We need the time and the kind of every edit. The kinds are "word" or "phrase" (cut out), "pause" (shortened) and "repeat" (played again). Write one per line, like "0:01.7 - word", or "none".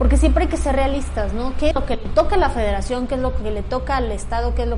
0:01.7 - word